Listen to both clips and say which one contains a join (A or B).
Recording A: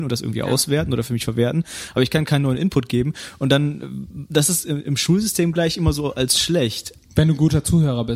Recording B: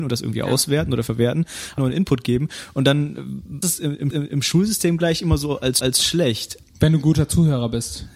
B